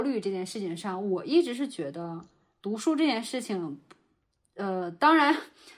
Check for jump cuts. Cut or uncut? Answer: uncut